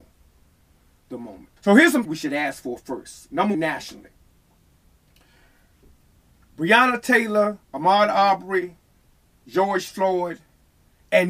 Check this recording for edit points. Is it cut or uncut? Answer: cut